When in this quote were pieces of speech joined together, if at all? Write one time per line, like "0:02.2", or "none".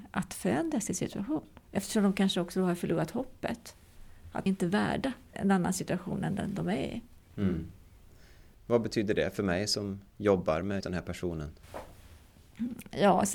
0:01.6
0:04.5
0:05.3
0:10.1
0:10.8